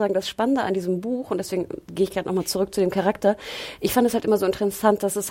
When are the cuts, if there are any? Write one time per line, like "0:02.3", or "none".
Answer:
0:01.8